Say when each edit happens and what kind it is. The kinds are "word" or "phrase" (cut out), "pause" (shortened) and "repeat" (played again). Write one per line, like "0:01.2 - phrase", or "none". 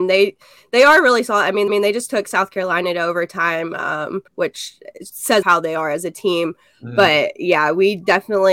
0:01.7 - repeat
0:04.3 - pause
0:05.4 - phrase